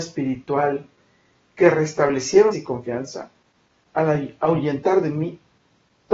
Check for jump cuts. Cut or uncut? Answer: cut